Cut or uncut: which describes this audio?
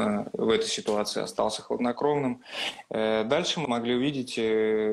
cut